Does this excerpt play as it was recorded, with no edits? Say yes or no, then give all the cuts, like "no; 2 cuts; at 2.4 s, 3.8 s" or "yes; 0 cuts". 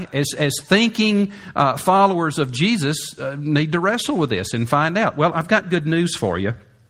yes; 0 cuts